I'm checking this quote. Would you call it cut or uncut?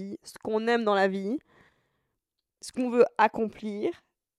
uncut